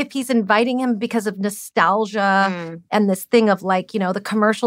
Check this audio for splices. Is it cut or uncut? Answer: uncut